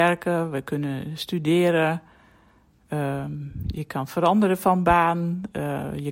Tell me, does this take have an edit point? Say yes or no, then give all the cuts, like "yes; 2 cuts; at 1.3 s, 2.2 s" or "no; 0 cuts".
no; 0 cuts